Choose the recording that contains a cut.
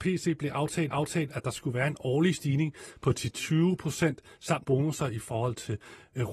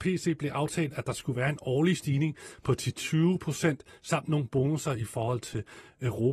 first; 2 cuts; at 0.9 s, 4.6 s

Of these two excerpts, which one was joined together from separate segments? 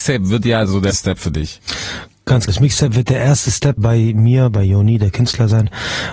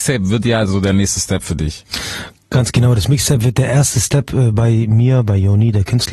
first; 3 cuts; at 0.9 s, 2.5 s, 3.8 s

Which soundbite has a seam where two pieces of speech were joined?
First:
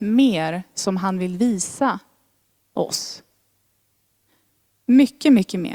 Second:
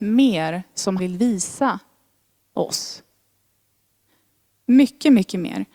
second; 1 cut; at 1.0 s

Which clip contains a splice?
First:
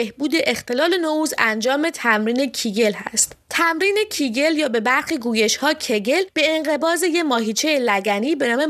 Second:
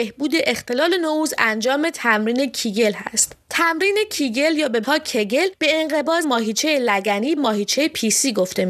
second; 3 cuts; at 4.8 s, 6.2 s, 7.4 s

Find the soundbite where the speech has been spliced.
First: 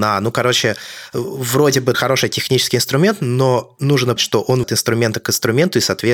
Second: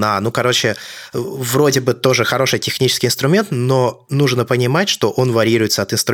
first; 3 cuts; at 1.9 s, 4.2 s, 4.6 s

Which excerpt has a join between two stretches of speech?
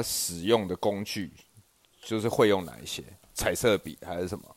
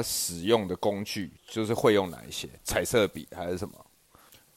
second; 2 cuts; at 1.4 s, 2.6 s

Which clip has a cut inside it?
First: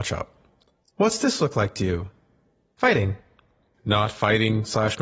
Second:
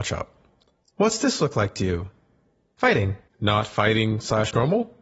second; 1 cut; at 3.3 s

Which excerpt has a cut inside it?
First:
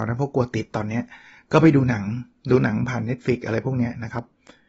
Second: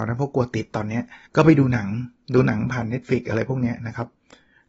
second; 1 cut; at 1.3 s

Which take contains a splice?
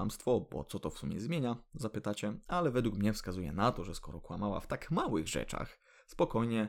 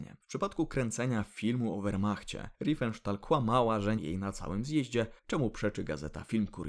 second; 3 cuts; at 2.5 s, 4.0 s, 5.2 s

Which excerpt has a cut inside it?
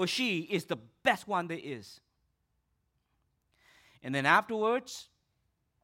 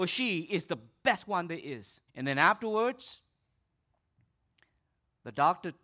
second; 1 cut; at 2.1 s

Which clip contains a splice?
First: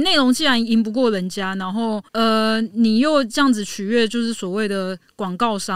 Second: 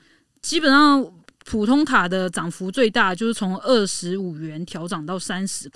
first; 1 cut; at 2.1 s

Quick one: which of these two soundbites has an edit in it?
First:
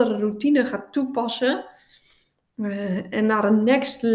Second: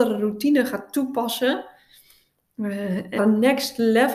second; 1 cut; at 3.2 s

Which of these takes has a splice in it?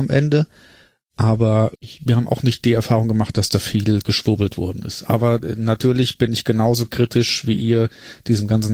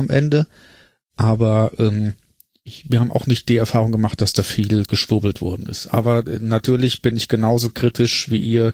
first; 1 cut; at 1.7 s

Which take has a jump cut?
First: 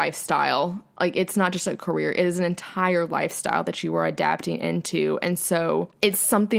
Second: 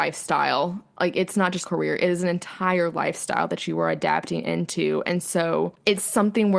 second; 1 cut; at 1.6 s

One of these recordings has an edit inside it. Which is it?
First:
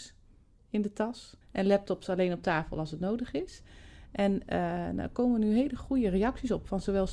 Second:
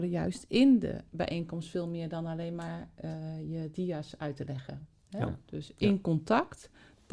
first; 1 cut; at 1.4 s

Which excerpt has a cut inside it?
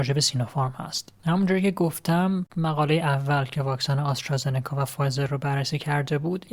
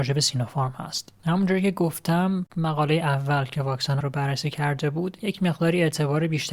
second; 1 cut; at 4.0 s

